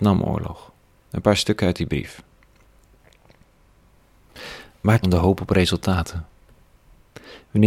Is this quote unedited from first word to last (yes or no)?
no